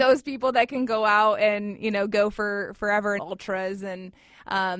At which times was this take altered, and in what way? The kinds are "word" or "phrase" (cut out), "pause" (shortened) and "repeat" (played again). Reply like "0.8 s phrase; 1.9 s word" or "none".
3.2 s phrase

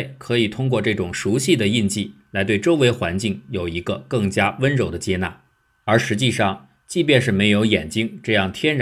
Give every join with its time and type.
none

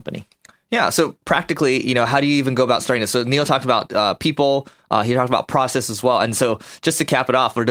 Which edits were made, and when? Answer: none

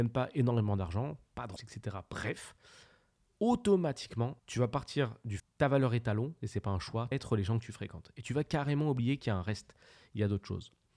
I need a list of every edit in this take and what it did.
1.6 s word; 4.4 s pause; 5.4 s phrase; 7.1 s phrase

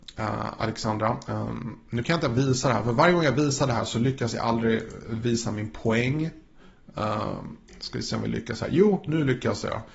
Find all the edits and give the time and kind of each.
none

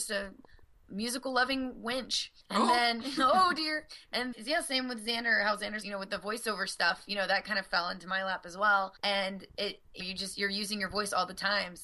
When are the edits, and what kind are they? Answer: 2.4 s pause; 4.3 s word; 5.8 s word; 9.0 s pause; 10.0 s word

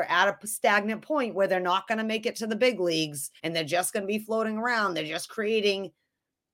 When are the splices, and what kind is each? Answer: 3.4 s pause

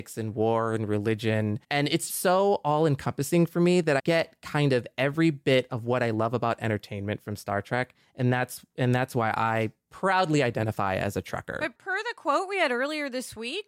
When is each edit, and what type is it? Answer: 1.6 s pause; 2.1 s word; 4.0 s word; 11.7 s word

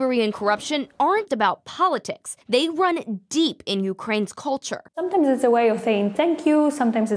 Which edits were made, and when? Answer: 1.3 s word; 2.4 s pause; 4.9 s pause

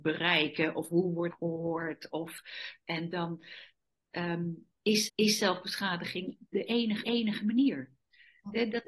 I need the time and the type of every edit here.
1.3 s word; 2.8 s word; 5.1 s repeat; 7.0 s repeat

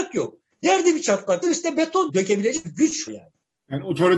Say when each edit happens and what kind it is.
1.4 s word; 2.1 s word; 2.6 s word; 3.1 s word

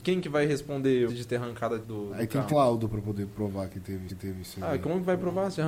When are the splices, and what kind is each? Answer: 1.1 s phrase; 1.8 s word; 2.5 s word; 4.1 s repeat

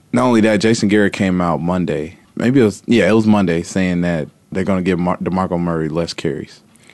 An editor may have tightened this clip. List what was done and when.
2.2 s pause; 4.5 s word

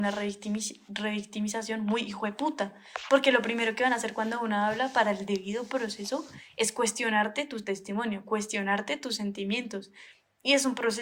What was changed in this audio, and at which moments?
none

